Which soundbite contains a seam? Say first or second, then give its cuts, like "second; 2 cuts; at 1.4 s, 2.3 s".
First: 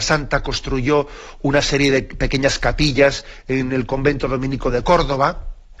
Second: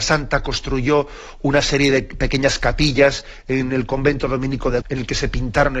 second; 1 cut; at 4.8 s